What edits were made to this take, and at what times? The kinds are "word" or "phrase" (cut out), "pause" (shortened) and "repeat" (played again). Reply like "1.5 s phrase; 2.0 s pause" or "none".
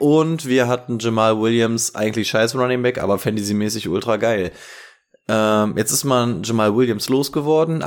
none